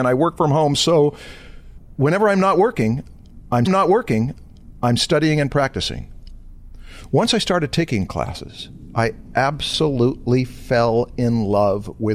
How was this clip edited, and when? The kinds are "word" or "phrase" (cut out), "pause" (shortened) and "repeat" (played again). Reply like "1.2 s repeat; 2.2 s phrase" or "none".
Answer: 3.7 s repeat